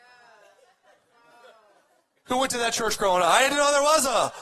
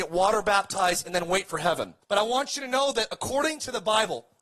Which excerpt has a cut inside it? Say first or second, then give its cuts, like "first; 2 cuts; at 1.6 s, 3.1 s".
second; 1 cut; at 2.0 s